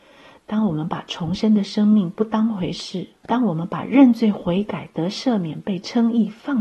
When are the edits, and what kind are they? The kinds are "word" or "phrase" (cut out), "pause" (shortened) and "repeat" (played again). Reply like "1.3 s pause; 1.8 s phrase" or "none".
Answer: 3.2 s pause

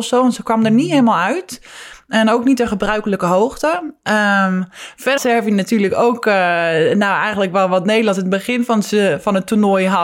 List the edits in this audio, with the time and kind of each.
5.2 s word

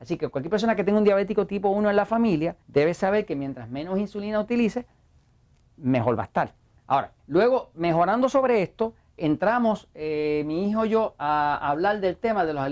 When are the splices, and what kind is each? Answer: 2.6 s pause; 7.2 s pause; 9.2 s word

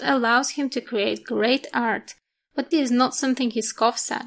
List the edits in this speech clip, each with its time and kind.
2.7 s word

